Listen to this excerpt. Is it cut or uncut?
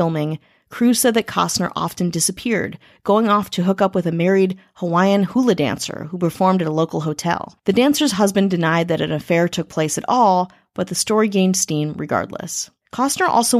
uncut